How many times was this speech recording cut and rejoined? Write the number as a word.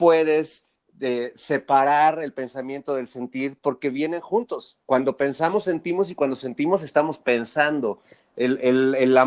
zero